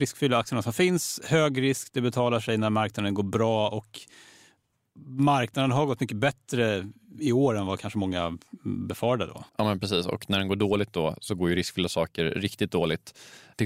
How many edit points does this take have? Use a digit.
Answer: 1